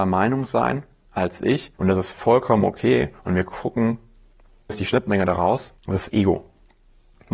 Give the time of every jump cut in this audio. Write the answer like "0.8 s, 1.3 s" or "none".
1.8 s, 3.2 s, 4.7 s, 5.8 s